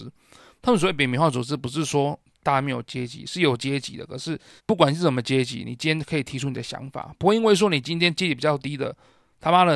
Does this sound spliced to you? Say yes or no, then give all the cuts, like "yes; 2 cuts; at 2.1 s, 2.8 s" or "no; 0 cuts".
yes; 1 cut; at 4.6 s